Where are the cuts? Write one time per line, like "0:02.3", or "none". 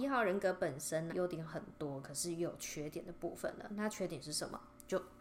0:01.1